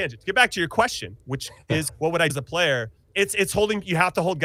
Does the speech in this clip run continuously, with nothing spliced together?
no; 4 cuts; at 1.2 s, 1.9 s, 2.3 s, 3.0 s

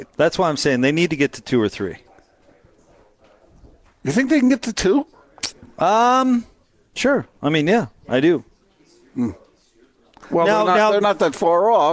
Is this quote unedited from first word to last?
yes; 0 cuts

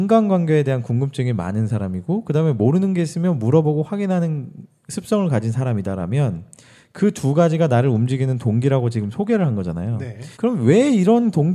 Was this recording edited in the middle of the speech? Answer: yes; 1 cut; at 10.3 s

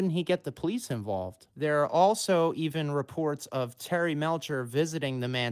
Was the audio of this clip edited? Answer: no; 0 cuts

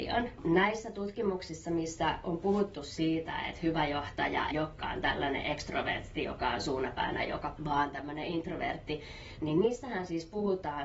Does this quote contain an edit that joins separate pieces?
yes; 3 cuts; at 4.5 s, 7.6 s, 9.4 s

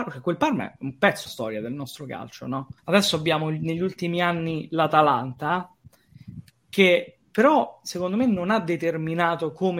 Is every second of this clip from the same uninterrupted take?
no; 2 cuts; at 1.3 s, 2.8 s

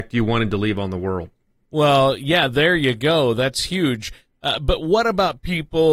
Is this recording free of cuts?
yes; 0 cuts

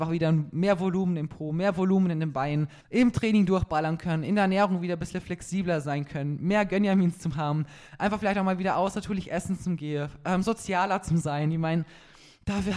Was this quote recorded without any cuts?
no; 1 cut; at 2.8 s

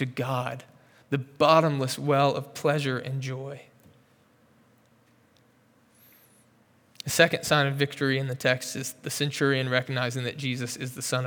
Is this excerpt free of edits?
yes; 0 cuts

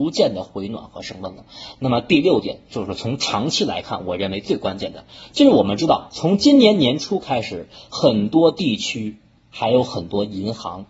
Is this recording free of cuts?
yes; 0 cuts

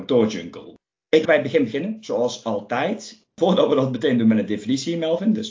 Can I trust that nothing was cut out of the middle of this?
no; 1 cut; at 1.2 s

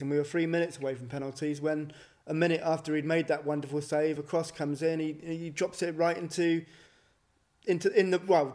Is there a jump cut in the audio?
no; 0 cuts

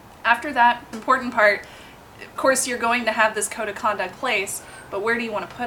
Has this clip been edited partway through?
yes; 3 cuts; at 0.9 s, 2.4 s, 4.1 s

